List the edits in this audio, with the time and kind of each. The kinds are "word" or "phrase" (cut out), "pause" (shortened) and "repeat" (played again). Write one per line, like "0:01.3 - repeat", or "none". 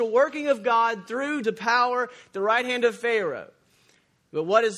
0:01.4 - phrase